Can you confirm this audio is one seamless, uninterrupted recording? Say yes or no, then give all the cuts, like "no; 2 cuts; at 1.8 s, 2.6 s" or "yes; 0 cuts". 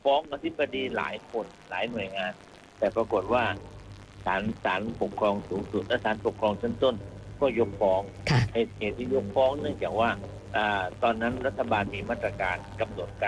yes; 0 cuts